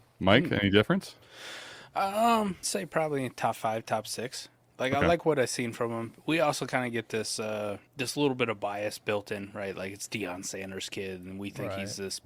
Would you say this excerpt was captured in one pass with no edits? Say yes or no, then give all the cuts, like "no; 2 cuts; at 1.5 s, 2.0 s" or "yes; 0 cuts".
no; 2 cuts; at 2.6 s, 7.9 s